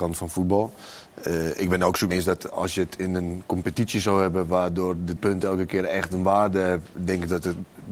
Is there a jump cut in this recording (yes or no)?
yes